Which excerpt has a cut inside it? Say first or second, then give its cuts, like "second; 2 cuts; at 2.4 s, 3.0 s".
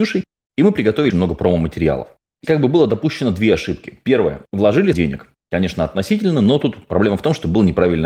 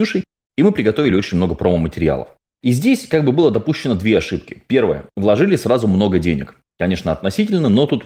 first; 3 cuts; at 1.1 s, 2.4 s, 4.9 s